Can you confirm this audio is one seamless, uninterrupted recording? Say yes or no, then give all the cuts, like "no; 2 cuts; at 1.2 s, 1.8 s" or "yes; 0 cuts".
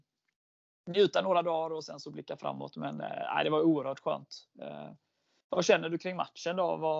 yes; 0 cuts